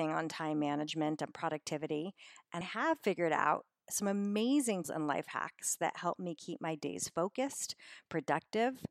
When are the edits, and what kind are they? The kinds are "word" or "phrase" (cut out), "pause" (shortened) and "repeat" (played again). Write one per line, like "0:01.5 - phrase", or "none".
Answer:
0:02.6 - word
0:04.8 - word